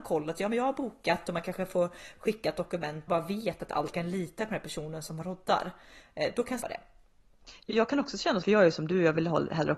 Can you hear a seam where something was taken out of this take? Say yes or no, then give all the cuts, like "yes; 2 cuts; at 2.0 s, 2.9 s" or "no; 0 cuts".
yes; 5 cuts; at 3.1 s, 3.9 s, 6.6 s, 7.7 s, 8.4 s